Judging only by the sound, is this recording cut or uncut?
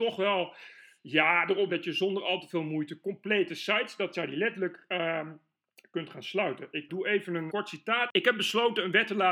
cut